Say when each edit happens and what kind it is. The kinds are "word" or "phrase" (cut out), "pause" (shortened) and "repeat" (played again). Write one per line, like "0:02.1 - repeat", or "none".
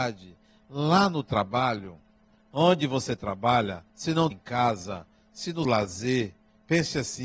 0:02.3 - pause
0:03.9 - pause
0:04.3 - word
0:05.6 - word